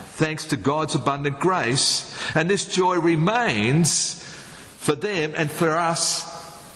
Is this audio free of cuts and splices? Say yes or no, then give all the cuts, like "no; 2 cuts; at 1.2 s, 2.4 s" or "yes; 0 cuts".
yes; 0 cuts